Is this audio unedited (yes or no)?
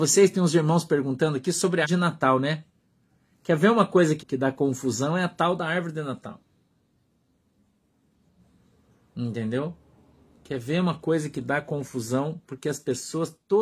no